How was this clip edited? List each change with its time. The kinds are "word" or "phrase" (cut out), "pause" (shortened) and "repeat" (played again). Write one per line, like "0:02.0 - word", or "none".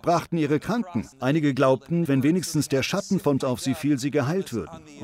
0:01.1 - pause
0:02.1 - word
0:03.4 - word

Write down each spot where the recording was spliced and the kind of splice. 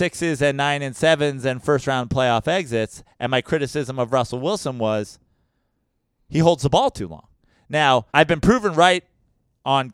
0:08.1 - pause

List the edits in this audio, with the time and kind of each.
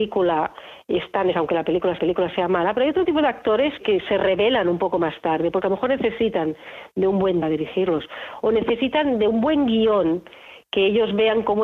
0:01.3 - word
0:02.0 - repeat
0:03.8 - word
0:07.4 - phrase

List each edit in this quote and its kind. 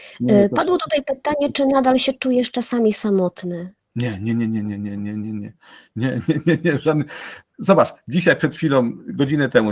0:03.8 - pause

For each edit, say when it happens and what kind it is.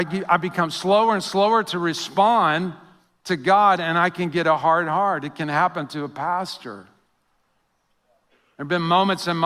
none

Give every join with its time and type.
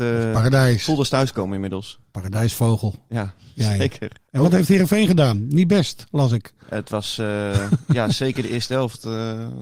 0:06.6 - pause

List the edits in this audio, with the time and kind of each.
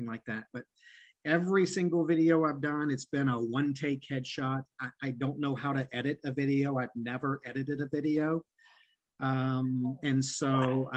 none

